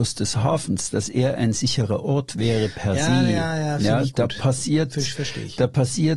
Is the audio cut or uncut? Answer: uncut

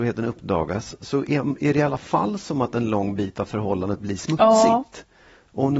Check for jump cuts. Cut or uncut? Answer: uncut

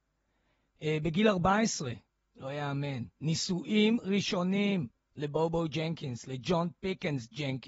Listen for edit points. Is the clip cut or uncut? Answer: uncut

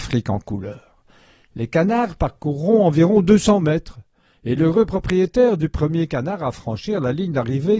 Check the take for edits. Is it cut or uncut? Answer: uncut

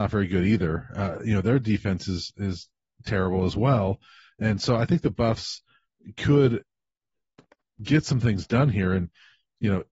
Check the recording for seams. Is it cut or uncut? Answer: uncut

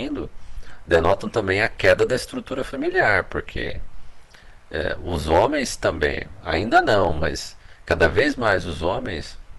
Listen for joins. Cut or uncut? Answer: uncut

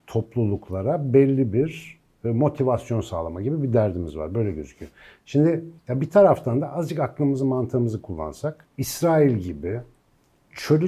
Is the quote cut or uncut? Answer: cut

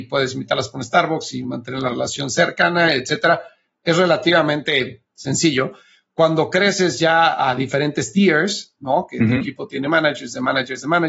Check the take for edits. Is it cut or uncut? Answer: uncut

